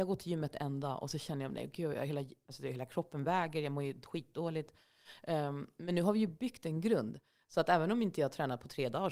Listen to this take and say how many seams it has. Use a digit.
0